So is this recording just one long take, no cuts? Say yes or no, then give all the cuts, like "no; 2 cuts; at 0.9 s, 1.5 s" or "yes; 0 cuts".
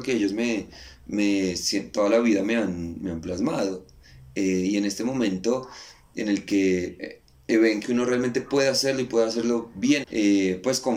no; 3 cuts; at 7.5 s, 7.8 s, 10.0 s